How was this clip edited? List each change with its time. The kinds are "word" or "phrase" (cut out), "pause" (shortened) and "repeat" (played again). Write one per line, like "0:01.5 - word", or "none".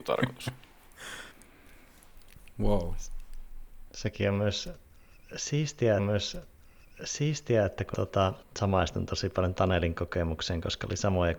0:01.3 - pause
0:06.0 - repeat
0:07.9 - word
0:08.4 - pause